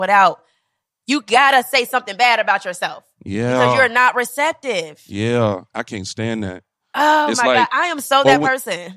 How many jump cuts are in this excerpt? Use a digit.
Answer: 0